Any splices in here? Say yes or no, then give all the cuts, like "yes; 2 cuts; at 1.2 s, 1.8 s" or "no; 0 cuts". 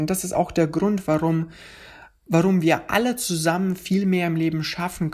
no; 0 cuts